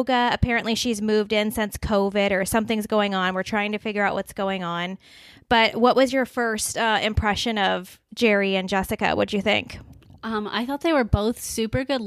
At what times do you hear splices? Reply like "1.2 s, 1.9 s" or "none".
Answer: 8.1 s